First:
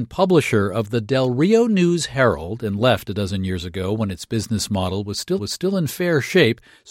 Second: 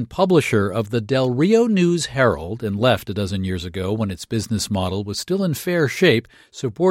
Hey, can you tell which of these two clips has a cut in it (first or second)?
first